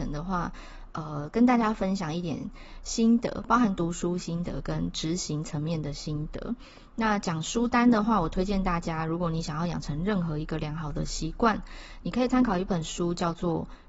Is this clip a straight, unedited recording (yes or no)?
yes